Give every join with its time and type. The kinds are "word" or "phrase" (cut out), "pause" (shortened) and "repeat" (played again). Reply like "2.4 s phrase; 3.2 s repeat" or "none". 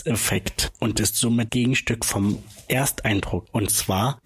1.5 s word